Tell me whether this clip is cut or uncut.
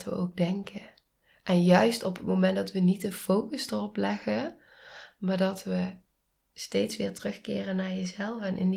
uncut